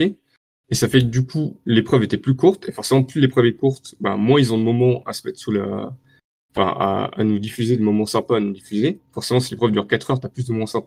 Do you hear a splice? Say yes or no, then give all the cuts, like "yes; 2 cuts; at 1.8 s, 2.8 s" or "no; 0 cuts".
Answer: no; 0 cuts